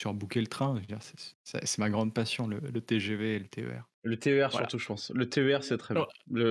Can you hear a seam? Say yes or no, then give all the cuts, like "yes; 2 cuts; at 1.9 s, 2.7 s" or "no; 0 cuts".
yes; 1 cut; at 3.9 s